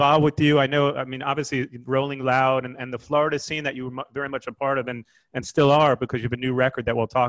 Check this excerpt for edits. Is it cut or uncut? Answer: uncut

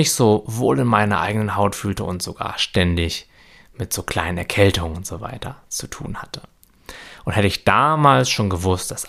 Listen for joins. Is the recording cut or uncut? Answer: uncut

